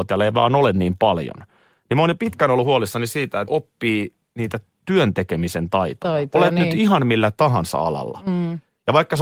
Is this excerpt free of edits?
no; 1 cut; at 3.5 s

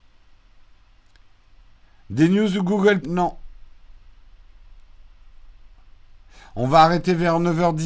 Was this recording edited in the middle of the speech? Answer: yes; 1 cut; at 3.0 s

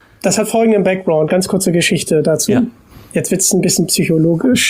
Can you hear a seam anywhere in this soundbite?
no; 0 cuts

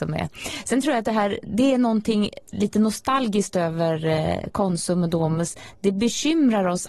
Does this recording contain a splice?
no; 0 cuts

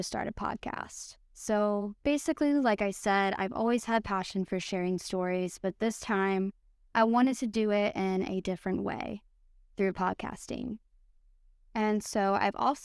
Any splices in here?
no; 0 cuts

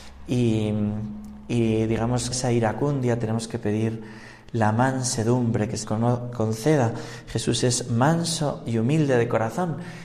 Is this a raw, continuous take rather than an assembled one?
no; 2 cuts; at 2.3 s, 5.8 s

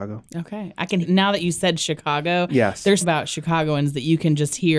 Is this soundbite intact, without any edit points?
no; 2 cuts; at 1.0 s, 3.0 s

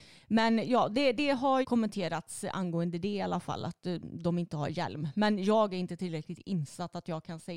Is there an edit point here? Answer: yes; 1 cut; at 1.6 s

